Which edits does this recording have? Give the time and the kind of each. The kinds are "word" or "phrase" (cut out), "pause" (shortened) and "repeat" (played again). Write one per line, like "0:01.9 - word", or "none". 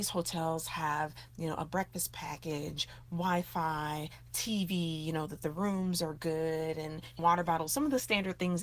0:07.2 - word